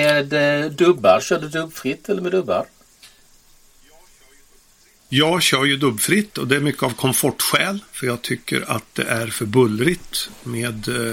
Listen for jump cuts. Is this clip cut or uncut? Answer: uncut